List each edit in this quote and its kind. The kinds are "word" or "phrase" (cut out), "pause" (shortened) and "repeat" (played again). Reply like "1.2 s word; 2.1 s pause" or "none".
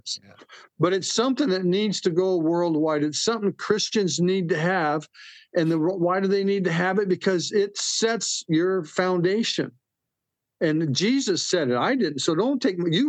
none